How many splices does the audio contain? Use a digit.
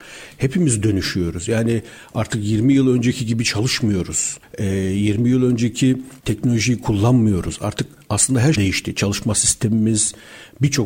1